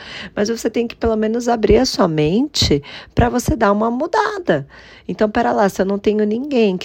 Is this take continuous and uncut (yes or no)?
yes